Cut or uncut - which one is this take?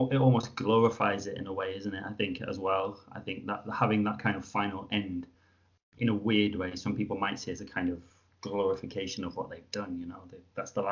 uncut